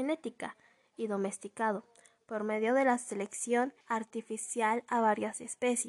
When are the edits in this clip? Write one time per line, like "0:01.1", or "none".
0:03.8

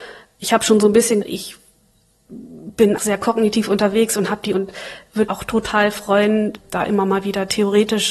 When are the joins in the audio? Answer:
0:01.2
0:03.0
0:04.5
0:05.3

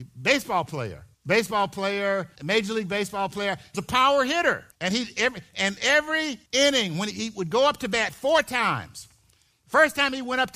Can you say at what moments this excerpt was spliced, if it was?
0:01.1
0:02.4
0:03.7
0:04.7
0:06.5
0:07.1

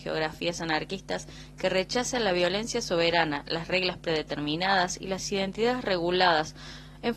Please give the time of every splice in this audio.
none

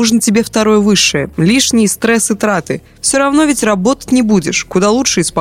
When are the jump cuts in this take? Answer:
none

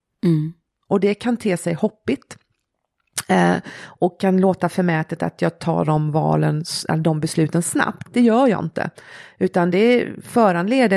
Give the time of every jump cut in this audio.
none

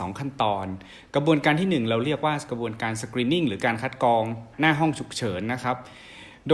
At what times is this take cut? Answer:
0:04.5

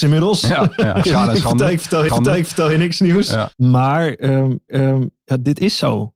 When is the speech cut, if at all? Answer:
0:01.0
0:02.1
0:03.5
0:04.7

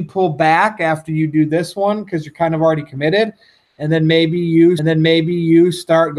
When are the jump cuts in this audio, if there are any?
0:04.8

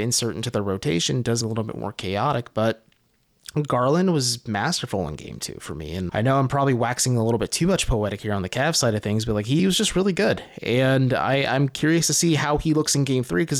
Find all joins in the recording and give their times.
0:01.4
0:06.1
0:09.6

